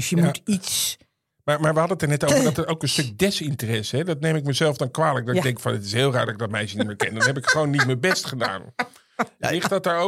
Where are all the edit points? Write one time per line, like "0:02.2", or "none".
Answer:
none